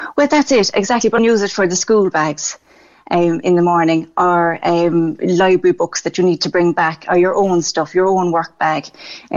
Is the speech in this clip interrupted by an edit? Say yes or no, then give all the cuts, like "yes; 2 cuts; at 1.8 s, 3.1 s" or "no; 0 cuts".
yes; 1 cut; at 1.2 s